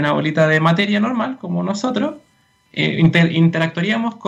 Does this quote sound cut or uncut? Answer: uncut